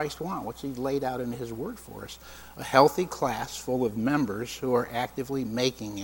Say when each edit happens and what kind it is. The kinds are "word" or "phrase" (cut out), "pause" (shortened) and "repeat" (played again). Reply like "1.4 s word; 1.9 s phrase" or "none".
none